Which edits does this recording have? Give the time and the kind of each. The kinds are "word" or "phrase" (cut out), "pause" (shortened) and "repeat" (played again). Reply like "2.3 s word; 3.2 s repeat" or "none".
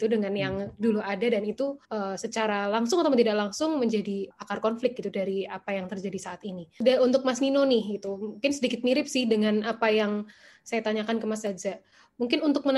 1.8 s pause; 4.3 s word

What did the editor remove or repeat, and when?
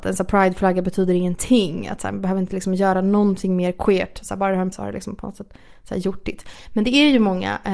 4.7 s word

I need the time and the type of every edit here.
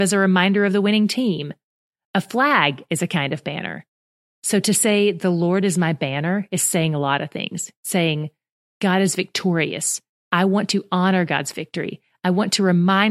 none

